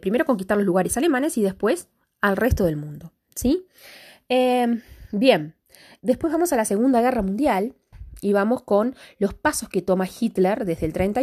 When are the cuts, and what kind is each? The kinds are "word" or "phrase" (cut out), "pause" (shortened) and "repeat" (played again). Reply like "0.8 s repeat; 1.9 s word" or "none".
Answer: 6.0 s word

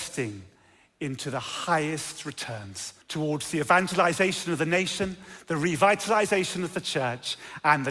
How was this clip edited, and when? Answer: 3.0 s pause

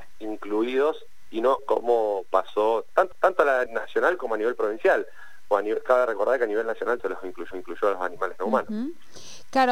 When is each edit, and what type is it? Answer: 1.6 s word; 3.1 s repeat; 3.7 s word; 7.0 s word; 7.5 s repeat

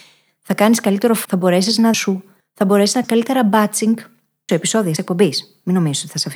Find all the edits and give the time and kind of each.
1.2 s word; 1.9 s phrase; 2.4 s pause; 3.0 s word; 4.5 s word; 5.0 s word

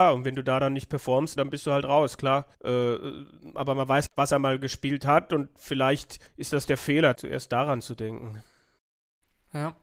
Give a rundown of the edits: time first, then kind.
1.4 s word; 2.5 s pause; 4.1 s word; 6.3 s pause; 7.1 s word

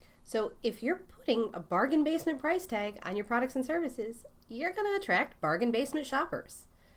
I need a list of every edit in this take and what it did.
none

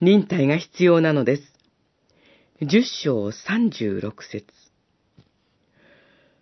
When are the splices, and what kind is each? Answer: none

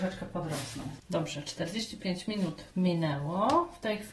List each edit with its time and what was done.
2.7 s pause

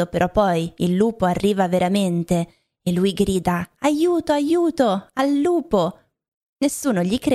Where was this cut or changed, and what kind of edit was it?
none

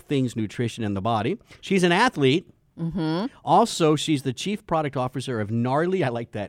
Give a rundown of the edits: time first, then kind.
none

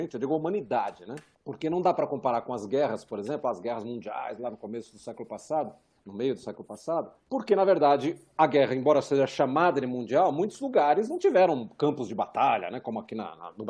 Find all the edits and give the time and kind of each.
1.3 s pause; 6.0 s pause; 7.2 s pause

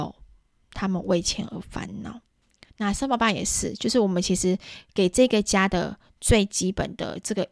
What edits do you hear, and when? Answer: none

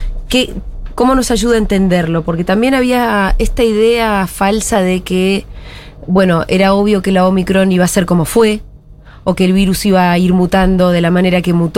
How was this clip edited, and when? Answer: none

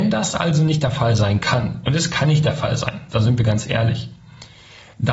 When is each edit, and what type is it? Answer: none

